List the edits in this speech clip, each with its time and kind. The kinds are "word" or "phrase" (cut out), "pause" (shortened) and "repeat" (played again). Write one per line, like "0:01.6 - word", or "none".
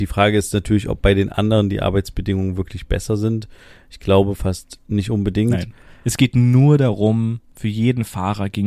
none